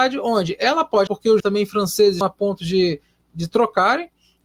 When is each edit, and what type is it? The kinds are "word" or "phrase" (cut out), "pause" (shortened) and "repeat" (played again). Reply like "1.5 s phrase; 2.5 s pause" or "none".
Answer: 1.1 s word; 1.4 s phrase; 2.2 s word